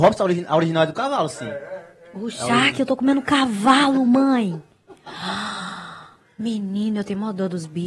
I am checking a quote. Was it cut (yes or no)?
no